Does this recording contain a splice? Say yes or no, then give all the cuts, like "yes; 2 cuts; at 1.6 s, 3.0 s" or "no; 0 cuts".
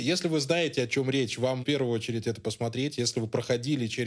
yes; 1 cut; at 1.6 s